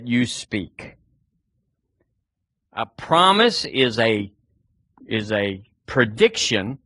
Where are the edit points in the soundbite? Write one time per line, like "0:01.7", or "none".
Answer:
0:04.9